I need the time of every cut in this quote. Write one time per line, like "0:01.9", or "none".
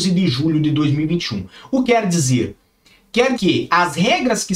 0:01.8
0:03.4